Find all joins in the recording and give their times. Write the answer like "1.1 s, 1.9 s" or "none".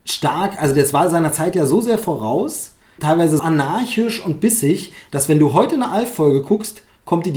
3.0 s, 3.4 s